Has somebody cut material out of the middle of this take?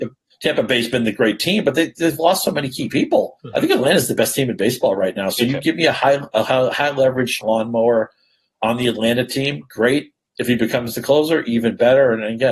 yes; 2 cuts; at 3.4 s, 7.4 s

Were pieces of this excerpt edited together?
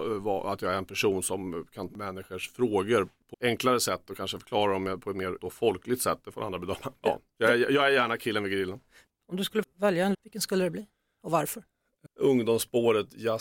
yes; 6 cuts; at 1.9 s, 3.3 s, 5.4 s, 9.6 s, 10.1 s, 12.1 s

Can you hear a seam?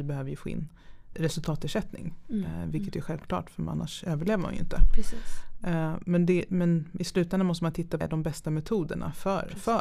yes; 2 cuts; at 1.1 s, 8.0 s

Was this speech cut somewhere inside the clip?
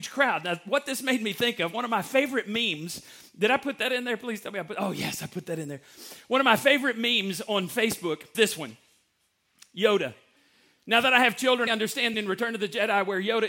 yes; 3 cuts; at 8.3 s, 11.7 s, 12.1 s

